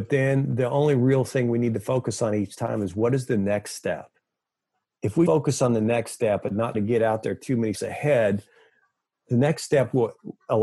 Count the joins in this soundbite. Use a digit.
3